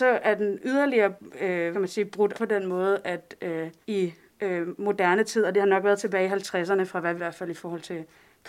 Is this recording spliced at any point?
yes; 4 cuts; at 1.7 s, 2.3 s, 3.8 s, 7.2 s

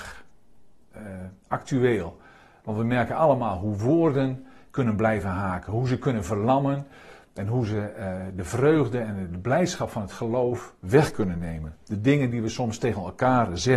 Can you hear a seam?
no; 0 cuts

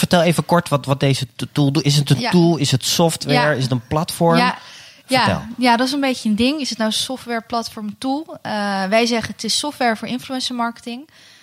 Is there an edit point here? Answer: no; 0 cuts

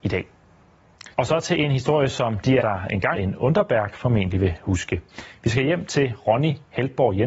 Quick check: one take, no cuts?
no; 3 cuts; at 1.1 s, 2.6 s, 3.1 s

